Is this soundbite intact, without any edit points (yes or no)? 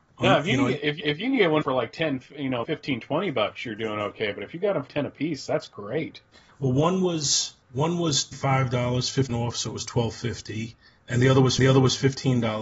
no